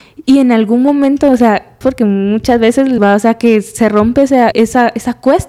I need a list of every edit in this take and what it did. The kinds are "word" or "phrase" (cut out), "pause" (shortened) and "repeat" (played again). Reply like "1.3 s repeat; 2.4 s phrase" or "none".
1.8 s word; 3.0 s word; 4.5 s word